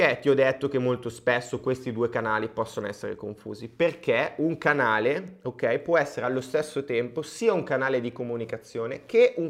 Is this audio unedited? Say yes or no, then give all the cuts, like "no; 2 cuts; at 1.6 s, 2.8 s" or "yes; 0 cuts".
yes; 0 cuts